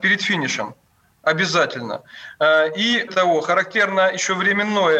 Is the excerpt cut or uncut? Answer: cut